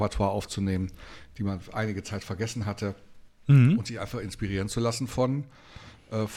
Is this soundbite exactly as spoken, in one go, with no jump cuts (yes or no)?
yes